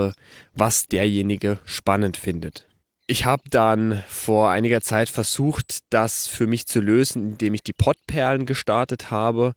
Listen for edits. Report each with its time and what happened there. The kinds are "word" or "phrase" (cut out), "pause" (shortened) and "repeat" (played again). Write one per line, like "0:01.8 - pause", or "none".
none